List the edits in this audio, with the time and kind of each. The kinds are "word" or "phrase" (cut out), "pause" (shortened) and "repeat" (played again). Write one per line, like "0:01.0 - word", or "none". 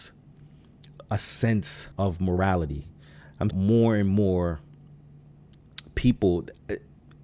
0:01.9 - pause
0:03.5 - word